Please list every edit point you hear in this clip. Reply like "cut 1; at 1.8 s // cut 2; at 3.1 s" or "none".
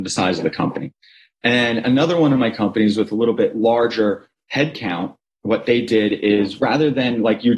none